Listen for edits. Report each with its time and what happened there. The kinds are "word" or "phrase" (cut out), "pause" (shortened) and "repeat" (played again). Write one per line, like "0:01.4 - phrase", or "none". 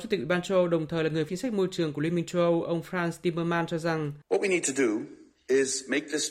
0:01.3 - word
0:04.2 - pause